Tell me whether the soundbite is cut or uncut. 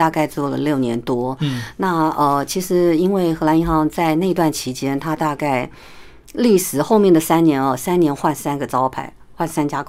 uncut